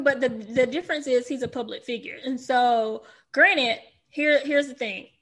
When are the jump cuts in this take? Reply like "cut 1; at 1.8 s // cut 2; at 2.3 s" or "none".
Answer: none